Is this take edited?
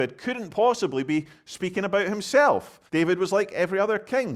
yes; 1 cut; at 2.9 s

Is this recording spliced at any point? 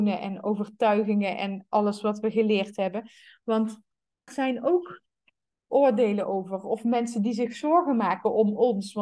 yes; 1 cut; at 4.3 s

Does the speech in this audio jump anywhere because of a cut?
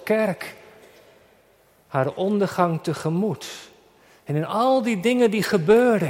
no; 0 cuts

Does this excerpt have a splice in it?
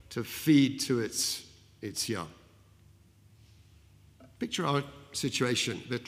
no; 0 cuts

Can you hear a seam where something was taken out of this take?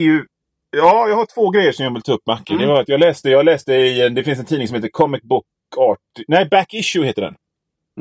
no; 0 cuts

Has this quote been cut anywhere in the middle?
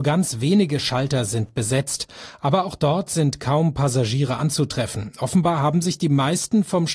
no; 0 cuts

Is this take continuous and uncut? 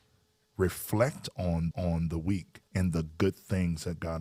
no; 2 cuts; at 1.7 s, 2.7 s

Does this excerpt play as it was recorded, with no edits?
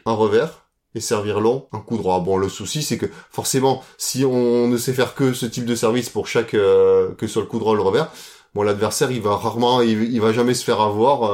yes; 0 cuts

